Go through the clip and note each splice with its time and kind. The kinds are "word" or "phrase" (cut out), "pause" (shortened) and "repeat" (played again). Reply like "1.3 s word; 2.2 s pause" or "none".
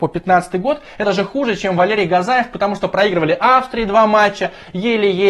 1.0 s word